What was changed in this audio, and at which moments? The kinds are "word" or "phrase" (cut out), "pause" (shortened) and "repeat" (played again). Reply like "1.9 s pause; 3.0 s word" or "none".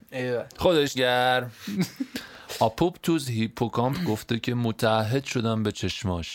0.9 s word